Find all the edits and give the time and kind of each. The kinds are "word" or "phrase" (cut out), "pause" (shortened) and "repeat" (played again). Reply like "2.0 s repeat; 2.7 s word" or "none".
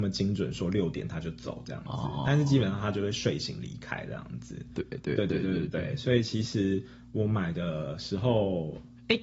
none